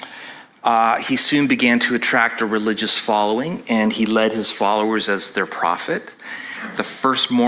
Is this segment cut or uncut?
uncut